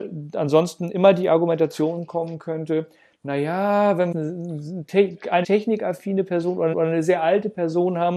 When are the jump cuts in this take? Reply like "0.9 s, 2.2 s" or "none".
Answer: 4.1 s, 5.4 s, 6.7 s